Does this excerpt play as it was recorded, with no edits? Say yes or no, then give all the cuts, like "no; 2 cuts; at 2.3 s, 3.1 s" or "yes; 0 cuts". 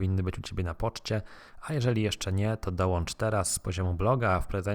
yes; 0 cuts